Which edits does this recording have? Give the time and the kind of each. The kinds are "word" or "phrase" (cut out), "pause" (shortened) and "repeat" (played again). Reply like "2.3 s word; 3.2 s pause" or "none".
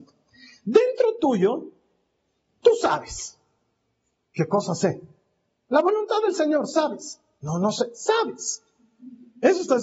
none